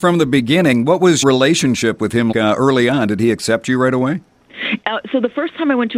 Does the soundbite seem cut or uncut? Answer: cut